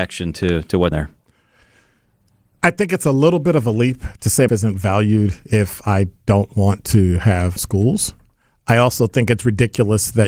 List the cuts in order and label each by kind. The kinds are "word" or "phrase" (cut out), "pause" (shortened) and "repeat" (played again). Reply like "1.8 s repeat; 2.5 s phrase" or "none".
0.9 s word; 4.5 s phrase; 7.6 s phrase